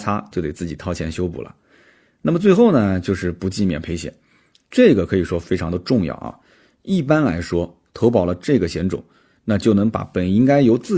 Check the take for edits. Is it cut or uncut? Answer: uncut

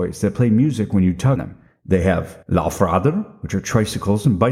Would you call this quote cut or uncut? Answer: cut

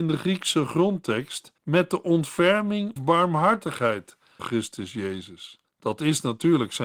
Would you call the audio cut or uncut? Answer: cut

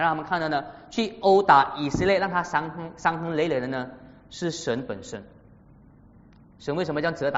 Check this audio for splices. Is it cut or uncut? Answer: uncut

